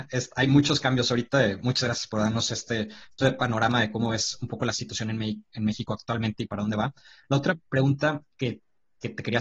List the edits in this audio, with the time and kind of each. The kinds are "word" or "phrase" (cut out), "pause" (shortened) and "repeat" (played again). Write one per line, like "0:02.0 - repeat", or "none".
none